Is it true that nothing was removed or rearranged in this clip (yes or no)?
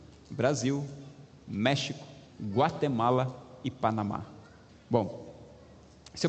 no